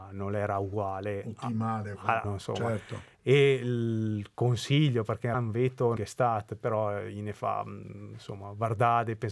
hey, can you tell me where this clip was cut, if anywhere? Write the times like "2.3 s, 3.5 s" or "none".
2.2 s, 5.3 s, 6.0 s